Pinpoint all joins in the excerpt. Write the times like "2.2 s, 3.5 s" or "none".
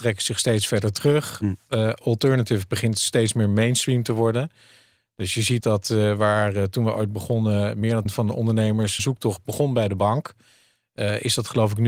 5.6 s, 8.1 s, 9.0 s